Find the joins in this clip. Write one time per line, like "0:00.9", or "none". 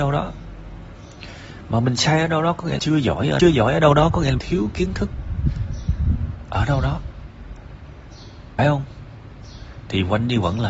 0:02.8
0:03.4
0:04.4
0:08.6